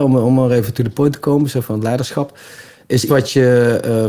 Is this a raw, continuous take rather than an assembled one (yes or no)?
no